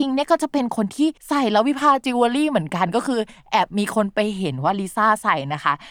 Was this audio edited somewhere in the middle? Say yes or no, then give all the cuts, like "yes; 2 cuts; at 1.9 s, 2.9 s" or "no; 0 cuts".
yes; 1 cut; at 1.2 s